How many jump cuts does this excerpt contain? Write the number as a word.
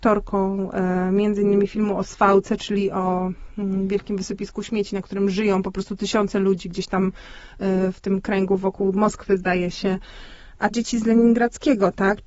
one